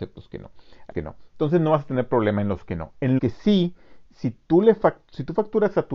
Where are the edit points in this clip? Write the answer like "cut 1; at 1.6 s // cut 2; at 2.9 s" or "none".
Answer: cut 1; at 0.9 s // cut 2; at 3.2 s